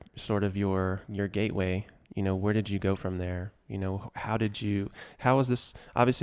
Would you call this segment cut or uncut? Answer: uncut